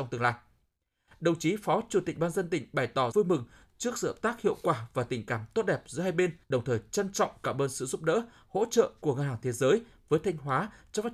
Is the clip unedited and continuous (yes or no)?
no